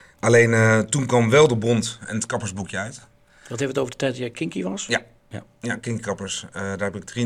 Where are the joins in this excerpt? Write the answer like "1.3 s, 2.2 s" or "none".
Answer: none